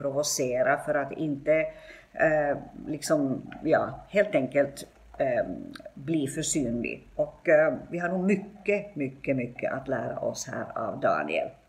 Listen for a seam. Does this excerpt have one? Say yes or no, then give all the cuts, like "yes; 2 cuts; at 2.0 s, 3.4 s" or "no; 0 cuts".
no; 0 cuts